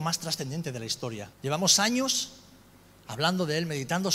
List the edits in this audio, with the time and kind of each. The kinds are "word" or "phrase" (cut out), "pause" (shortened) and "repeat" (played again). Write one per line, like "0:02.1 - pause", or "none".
0:01.3 - pause